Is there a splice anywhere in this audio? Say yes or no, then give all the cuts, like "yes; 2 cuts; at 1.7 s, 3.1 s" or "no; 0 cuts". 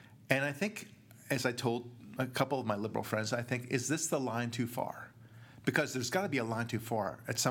no; 0 cuts